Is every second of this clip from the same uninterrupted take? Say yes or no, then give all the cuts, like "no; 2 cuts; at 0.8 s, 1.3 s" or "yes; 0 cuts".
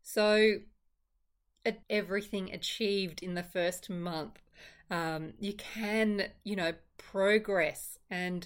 no; 1 cut; at 1.8 s